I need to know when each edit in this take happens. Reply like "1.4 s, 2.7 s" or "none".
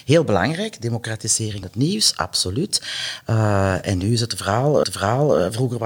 1.6 s, 4.8 s